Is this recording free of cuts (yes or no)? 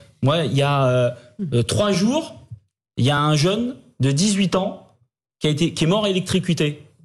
yes